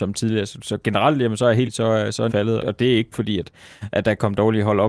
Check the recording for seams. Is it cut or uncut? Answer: cut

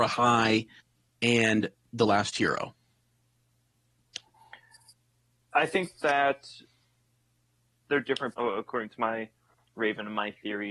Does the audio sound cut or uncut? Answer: cut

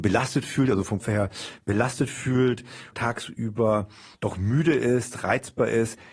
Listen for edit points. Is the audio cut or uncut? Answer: cut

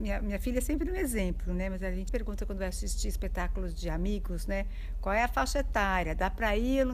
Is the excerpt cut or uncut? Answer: cut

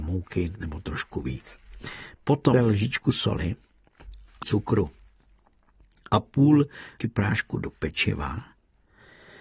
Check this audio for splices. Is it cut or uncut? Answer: cut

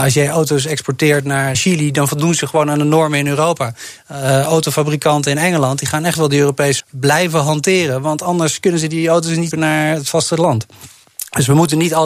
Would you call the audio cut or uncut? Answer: cut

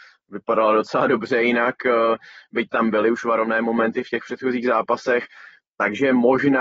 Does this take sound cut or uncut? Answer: uncut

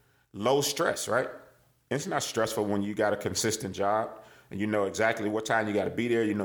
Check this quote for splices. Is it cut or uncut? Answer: uncut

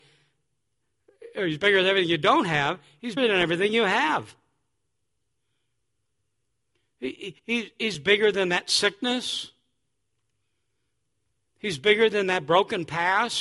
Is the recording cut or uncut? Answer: cut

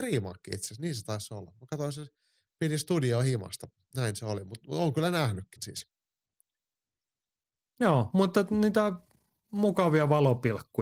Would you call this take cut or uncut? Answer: cut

